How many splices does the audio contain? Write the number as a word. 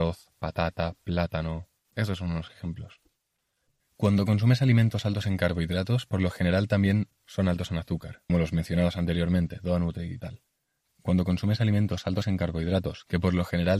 three